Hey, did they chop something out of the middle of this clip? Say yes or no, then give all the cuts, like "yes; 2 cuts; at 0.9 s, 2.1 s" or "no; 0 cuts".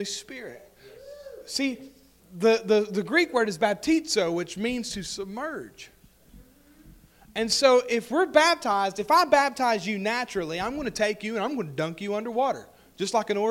no; 0 cuts